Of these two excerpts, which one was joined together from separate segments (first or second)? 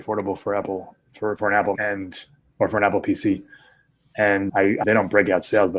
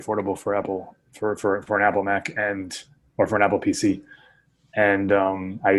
first